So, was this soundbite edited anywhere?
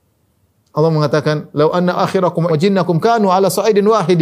yes; 2 cuts; at 1.9 s, 2.5 s

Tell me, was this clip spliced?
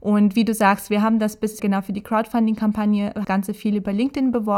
yes; 2 cuts; at 1.6 s, 3.2 s

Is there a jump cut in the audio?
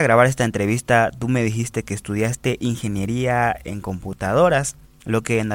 no; 0 cuts

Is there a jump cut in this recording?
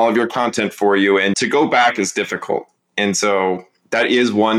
no; 0 cuts

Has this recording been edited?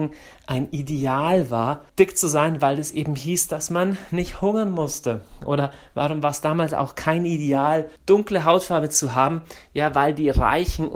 yes; 2 cuts; at 1.9 s, 8.0 s

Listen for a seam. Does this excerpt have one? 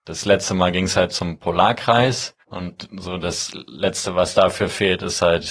yes; 1 cut; at 2.4 s

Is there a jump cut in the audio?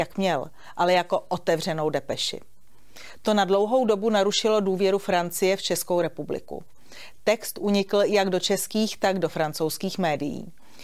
no; 0 cuts

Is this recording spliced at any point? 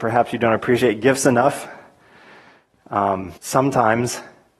yes; 1 cut; at 3.4 s

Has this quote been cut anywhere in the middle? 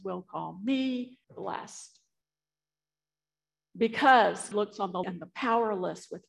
yes; 3 cuts; at 1.2 s, 4.5 s, 5.0 s

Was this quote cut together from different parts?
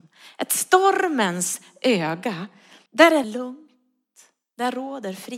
yes; 2 cuts; at 2.9 s, 3.2 s

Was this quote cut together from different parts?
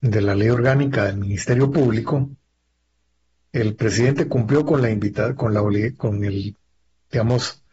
no; 0 cuts

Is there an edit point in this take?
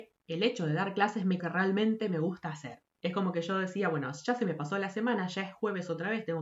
yes; 1 cut; at 1.4 s

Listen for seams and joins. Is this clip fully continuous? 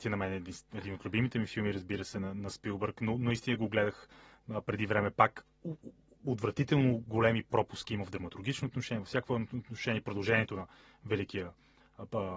yes; 0 cuts

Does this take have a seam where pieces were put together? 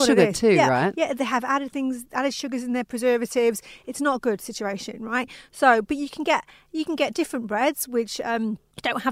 no; 0 cuts

